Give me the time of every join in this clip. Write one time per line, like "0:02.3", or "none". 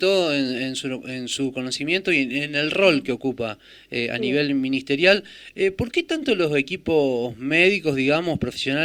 none